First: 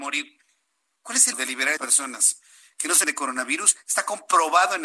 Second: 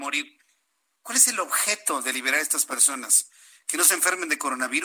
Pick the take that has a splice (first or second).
first